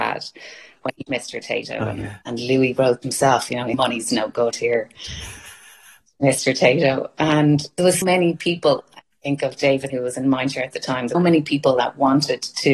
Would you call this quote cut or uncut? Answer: cut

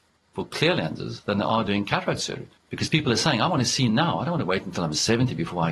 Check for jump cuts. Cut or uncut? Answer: uncut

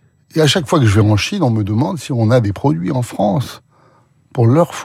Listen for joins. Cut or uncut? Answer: uncut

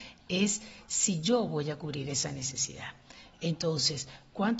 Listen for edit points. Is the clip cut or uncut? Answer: uncut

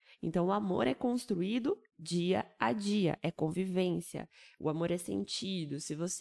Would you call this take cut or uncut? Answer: uncut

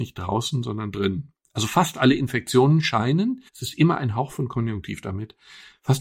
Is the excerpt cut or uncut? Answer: cut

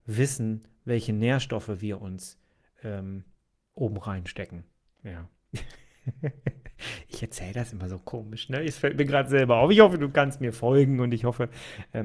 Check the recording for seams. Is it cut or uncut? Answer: uncut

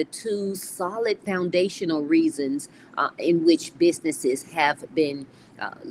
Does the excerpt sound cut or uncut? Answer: uncut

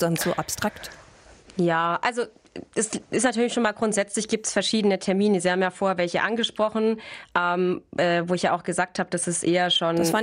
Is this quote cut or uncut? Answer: uncut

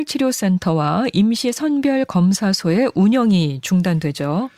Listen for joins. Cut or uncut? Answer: uncut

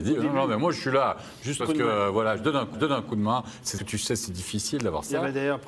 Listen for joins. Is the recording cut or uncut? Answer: cut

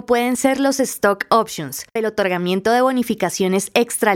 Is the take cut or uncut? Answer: cut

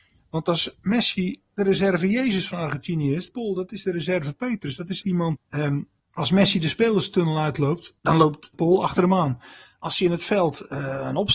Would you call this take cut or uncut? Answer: cut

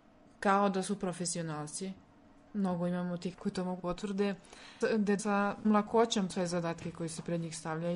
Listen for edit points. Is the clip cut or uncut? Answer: cut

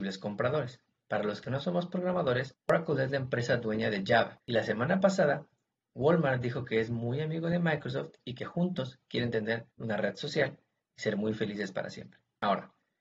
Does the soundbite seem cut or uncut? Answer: cut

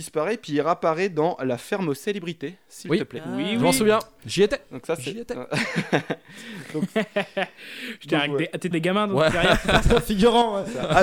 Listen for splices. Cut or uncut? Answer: cut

